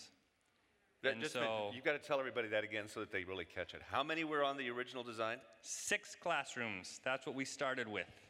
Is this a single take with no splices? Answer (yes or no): yes